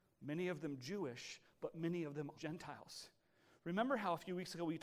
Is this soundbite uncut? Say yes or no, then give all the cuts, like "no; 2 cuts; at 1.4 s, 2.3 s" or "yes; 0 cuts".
no; 1 cut; at 2.3 s